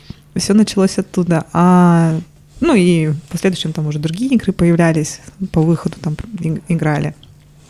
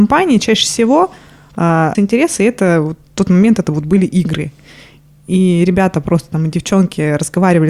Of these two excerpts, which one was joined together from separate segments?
second; 1 cut; at 1.9 s

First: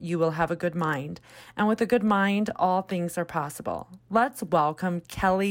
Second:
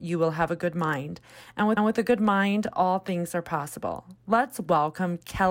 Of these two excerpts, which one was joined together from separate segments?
second; 1 cut; at 1.8 s

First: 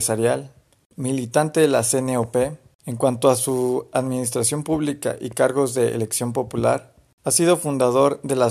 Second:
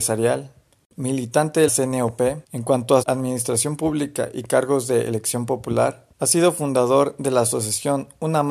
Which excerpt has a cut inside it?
second; 4 cuts; at 1.7 s, 2.4 s, 3.0 s, 6.1 s

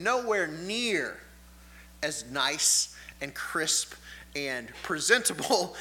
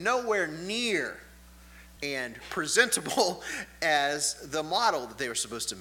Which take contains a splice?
second; 1 cut; at 2.0 s

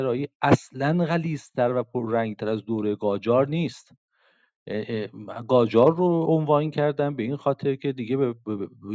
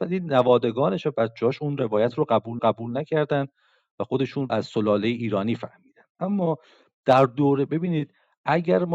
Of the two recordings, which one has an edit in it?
second; 2 cuts; at 2.6 s, 4.5 s

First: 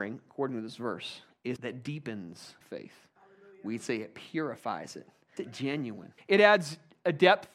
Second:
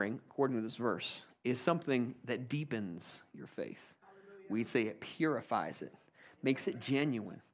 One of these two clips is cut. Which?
first; 4 cuts; at 1.6 s, 2.6 s, 5.4 s, 6.2 s

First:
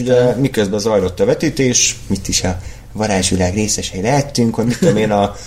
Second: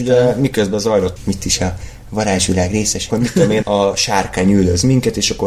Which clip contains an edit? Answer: second; 3 cuts; at 1.2 s, 3.1 s, 3.6 s

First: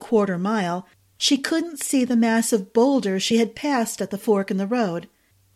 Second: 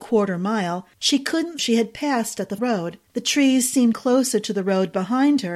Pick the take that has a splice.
second; 5 cuts; at 0.9 s, 1.6 s, 2.6 s, 3.1 s, 3.9 s

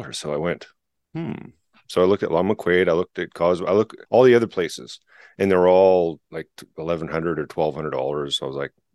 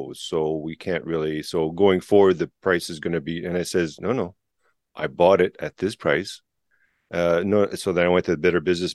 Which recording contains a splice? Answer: first; 2 cuts; at 4.1 s, 6.2 s

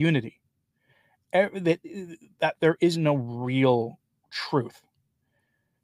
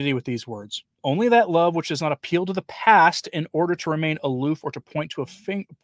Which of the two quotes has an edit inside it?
second; 1 cut; at 0.9 s

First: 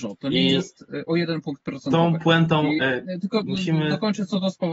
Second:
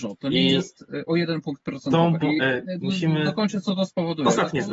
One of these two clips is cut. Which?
second; 2 cuts; at 2.2 s, 2.8 s

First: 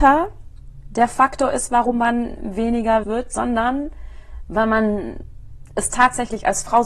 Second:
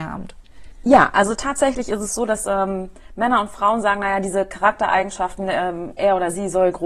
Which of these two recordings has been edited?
first; 1 cut; at 3.0 s

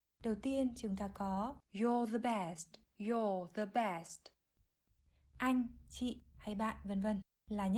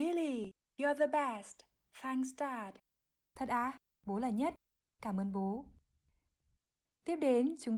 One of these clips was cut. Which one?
first; 2 cuts; at 1.6 s, 2.8 s

